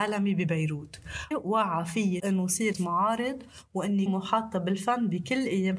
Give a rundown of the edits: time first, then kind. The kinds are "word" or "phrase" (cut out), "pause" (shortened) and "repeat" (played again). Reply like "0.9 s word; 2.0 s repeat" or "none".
1.3 s word; 2.2 s word; 2.7 s word; 4.1 s word